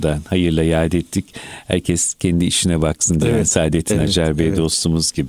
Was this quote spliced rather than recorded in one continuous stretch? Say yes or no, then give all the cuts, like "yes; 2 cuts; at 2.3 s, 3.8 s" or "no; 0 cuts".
no; 0 cuts